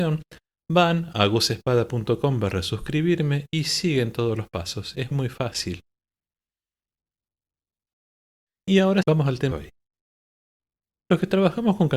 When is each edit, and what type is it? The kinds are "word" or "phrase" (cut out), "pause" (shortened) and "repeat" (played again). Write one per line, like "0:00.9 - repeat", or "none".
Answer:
0:05.1 - word
0:09.0 - word
0:09.5 - word